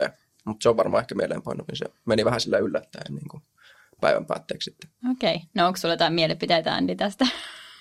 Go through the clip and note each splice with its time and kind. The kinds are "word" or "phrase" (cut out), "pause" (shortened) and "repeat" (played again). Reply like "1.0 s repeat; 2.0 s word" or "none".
5.0 s pause